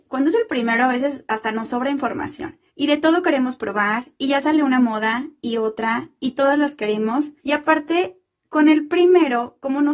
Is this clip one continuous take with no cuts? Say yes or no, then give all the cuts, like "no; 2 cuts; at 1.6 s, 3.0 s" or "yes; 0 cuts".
no; 2 cuts; at 2.7 s, 7.4 s